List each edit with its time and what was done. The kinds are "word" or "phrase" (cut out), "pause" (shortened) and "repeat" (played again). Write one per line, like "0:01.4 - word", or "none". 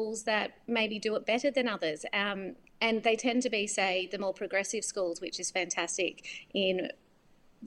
none